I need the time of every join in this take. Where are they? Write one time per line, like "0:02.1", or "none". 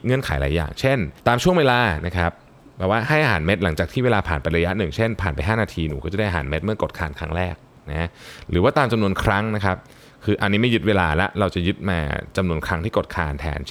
0:01.2